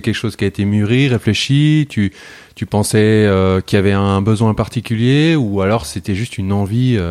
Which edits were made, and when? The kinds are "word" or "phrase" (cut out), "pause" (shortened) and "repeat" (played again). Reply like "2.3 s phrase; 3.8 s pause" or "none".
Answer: none